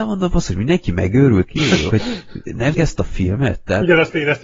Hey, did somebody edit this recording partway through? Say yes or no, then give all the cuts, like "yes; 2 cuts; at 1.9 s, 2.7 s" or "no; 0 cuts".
yes; 3 cuts; at 1.5 s, 1.9 s, 2.7 s